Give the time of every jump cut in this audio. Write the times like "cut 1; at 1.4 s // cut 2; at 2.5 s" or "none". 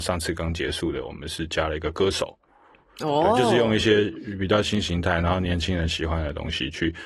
none